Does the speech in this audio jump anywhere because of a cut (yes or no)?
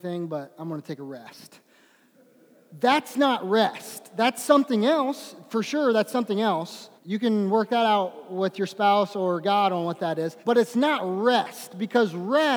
yes